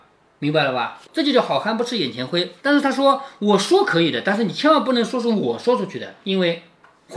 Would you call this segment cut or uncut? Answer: cut